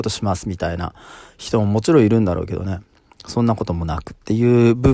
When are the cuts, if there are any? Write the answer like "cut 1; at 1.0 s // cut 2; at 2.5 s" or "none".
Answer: none

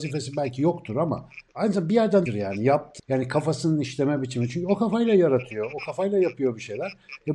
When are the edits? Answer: cut 1; at 1.5 s // cut 2; at 2.3 s // cut 3; at 3.0 s

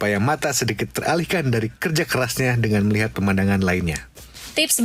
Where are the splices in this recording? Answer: none

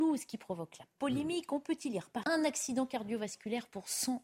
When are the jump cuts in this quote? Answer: cut 1; at 2.2 s

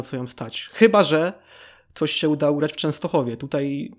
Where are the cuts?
none

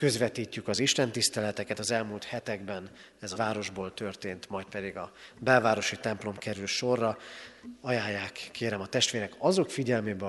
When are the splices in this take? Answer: cut 1; at 3.3 s

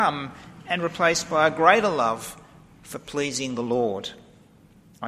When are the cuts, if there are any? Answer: none

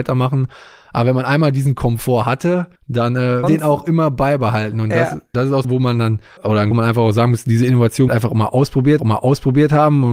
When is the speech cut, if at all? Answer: cut 1; at 2.8 s // cut 2; at 3.4 s // cut 3; at 5.3 s // cut 4; at 5.6 s // cut 5; at 6.4 s // cut 6; at 6.7 s // cut 7; at 8.1 s // cut 8; at 9.0 s

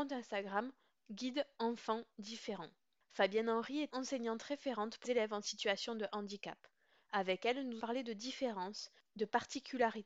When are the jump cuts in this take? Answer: cut 1; at 3.9 s // cut 2; at 5.0 s // cut 3; at 7.8 s

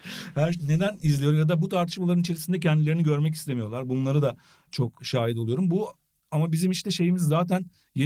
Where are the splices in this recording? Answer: none

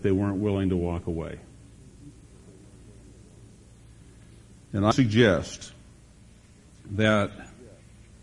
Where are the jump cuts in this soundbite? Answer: cut 1; at 4.9 s

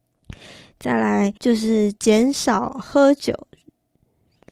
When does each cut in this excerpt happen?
cut 1; at 1.4 s // cut 2; at 2.0 s

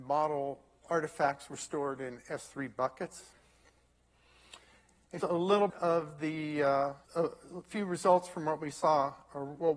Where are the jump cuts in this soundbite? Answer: cut 1; at 5.2 s // cut 2; at 5.7 s // cut 3; at 7.0 s

